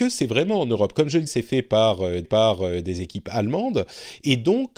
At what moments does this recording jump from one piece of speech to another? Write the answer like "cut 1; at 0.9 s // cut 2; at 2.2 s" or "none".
cut 1; at 1.3 s // cut 2; at 2.2 s